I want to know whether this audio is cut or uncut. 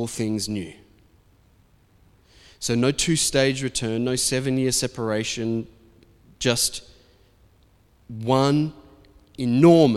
uncut